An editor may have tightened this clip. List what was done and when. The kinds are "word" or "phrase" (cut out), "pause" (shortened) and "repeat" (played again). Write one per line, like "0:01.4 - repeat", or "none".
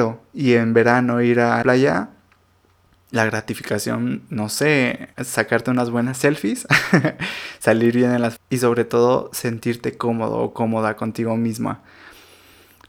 0:01.6 - word
0:05.1 - pause
0:08.4 - word